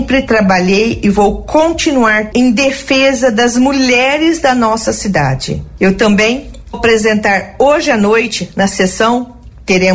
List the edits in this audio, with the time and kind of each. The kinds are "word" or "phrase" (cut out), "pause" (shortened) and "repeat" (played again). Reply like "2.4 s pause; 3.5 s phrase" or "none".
2.3 s word; 6.7 s word